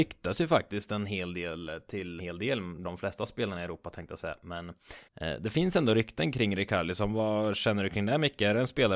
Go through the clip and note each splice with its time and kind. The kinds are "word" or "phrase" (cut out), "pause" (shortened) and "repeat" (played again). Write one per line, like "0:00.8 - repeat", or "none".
0:02.2 - phrase
0:02.8 - phrase
0:05.1 - pause